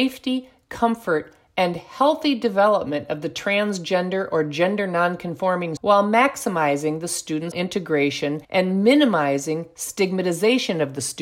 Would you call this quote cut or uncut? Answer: cut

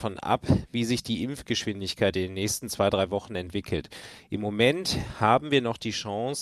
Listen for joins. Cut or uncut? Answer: uncut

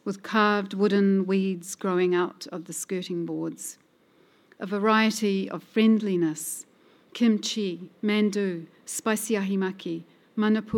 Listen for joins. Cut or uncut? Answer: uncut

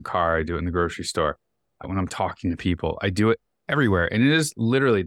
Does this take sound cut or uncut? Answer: cut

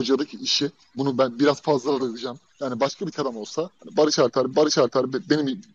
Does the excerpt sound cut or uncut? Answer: cut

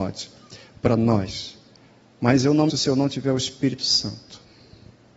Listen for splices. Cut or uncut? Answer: cut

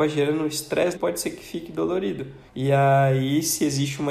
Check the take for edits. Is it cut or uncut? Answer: cut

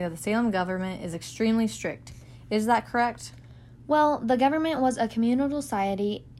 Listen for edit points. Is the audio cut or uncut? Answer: uncut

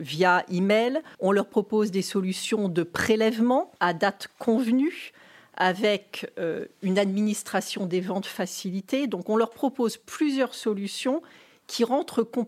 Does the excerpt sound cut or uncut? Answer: cut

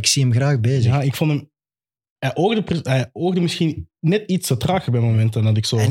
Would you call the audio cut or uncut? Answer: uncut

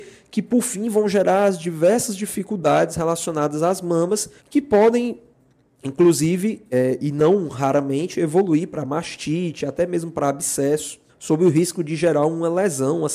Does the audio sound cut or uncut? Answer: cut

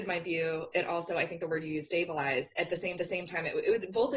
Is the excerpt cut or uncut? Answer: cut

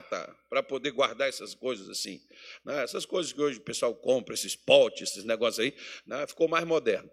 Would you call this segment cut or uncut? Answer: uncut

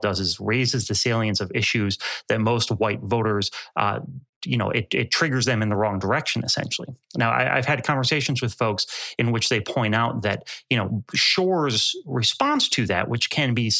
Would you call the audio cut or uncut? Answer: uncut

